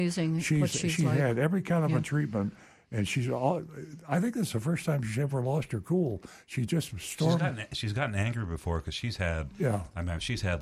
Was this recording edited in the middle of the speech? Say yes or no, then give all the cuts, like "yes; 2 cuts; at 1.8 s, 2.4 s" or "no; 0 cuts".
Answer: no; 0 cuts